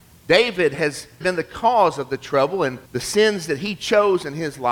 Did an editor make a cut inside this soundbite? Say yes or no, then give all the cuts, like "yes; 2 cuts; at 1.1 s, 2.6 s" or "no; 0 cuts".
yes; 2 cuts; at 1.2 s, 2.9 s